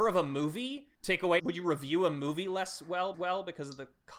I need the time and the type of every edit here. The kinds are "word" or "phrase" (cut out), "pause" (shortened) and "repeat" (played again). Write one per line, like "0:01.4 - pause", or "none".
0:00.9 - pause
0:01.4 - phrase
0:03.1 - repeat